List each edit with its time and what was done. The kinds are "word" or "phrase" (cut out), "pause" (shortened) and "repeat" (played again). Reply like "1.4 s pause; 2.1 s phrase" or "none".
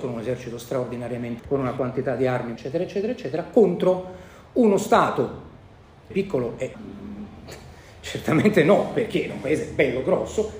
1.4 s word; 2.6 s word; 6.1 s word; 6.7 s word; 9.3 s word